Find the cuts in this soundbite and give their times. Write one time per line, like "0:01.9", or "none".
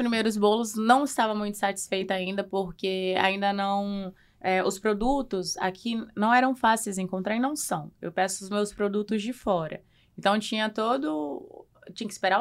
none